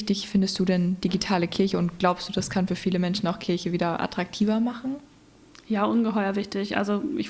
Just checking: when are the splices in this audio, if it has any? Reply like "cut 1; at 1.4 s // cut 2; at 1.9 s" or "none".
none